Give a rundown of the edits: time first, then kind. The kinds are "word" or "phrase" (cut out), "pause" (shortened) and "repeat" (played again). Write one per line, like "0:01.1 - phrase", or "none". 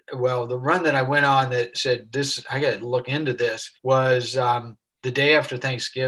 0:01.7 - word
0:03.8 - pause